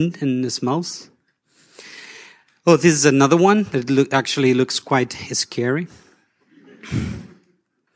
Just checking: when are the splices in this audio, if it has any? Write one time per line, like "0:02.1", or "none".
none